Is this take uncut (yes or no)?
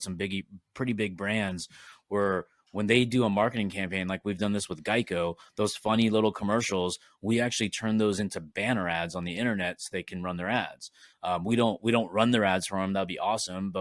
yes